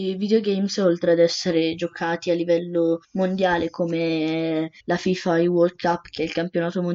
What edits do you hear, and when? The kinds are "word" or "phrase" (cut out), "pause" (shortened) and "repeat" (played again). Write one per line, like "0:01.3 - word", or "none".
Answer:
0:03.0 - pause
0:04.8 - pause